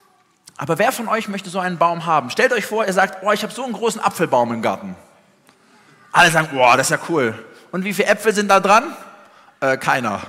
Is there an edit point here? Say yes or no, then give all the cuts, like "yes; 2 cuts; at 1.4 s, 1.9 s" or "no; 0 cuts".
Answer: no; 0 cuts